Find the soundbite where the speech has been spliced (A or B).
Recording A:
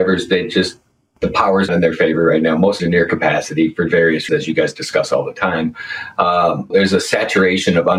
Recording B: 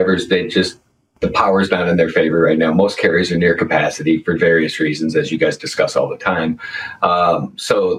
A